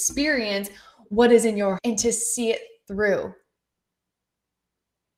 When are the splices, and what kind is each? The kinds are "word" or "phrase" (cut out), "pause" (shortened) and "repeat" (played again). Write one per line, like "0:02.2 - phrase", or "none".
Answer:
0:01.8 - word